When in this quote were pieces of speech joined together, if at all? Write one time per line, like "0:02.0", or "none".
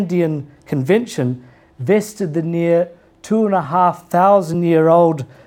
none